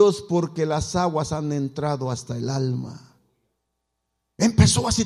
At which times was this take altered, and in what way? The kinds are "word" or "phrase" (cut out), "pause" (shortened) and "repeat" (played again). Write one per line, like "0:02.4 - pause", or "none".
none